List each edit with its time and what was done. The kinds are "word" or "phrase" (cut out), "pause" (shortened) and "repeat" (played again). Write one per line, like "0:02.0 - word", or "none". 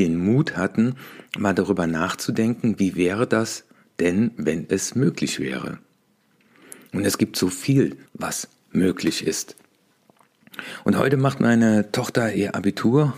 0:08.1 - pause